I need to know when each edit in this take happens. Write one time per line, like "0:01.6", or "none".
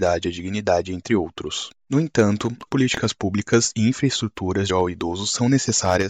0:02.7
0:04.7